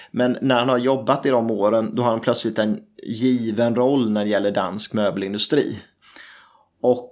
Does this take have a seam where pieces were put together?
no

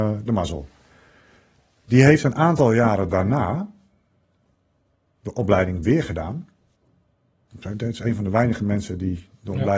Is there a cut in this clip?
yes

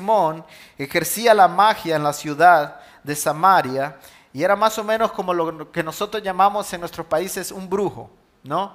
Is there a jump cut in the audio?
no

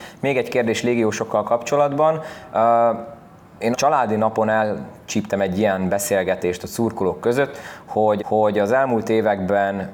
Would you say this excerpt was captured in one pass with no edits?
no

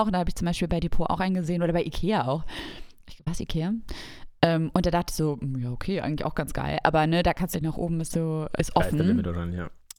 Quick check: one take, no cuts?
no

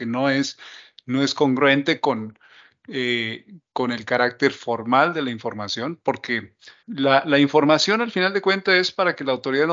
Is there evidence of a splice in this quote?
yes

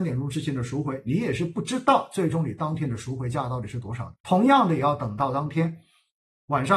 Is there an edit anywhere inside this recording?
yes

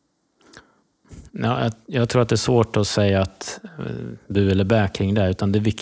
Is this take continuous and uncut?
yes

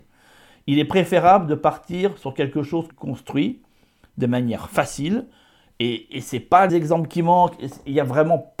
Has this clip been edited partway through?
yes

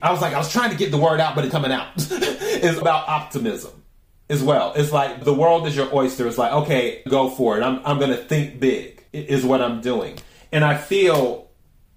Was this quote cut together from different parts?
yes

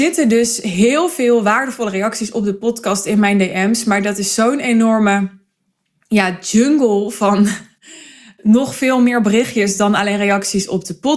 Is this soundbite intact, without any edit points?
yes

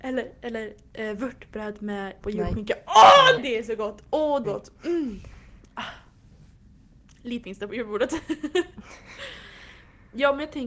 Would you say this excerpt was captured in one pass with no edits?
no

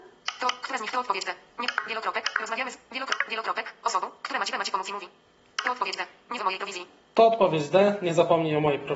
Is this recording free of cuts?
no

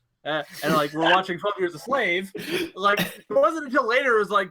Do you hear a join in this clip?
no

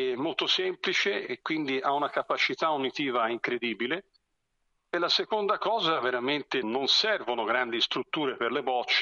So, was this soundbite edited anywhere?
yes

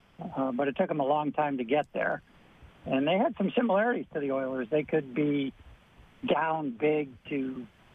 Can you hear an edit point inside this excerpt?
no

